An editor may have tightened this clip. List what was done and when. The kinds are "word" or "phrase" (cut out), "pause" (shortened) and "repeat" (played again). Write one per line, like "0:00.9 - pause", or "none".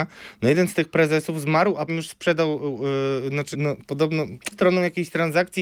0:01.9 - word
0:03.5 - word
0:04.5 - word